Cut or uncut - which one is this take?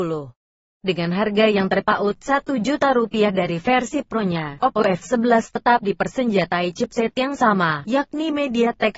uncut